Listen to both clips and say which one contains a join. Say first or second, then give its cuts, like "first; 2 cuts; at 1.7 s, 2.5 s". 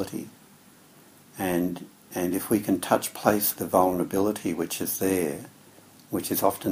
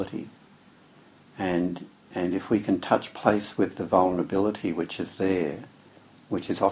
first; 1 cut; at 3.6 s